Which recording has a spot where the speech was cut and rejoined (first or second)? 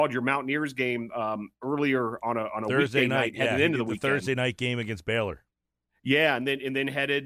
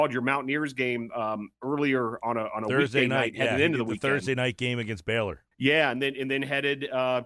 second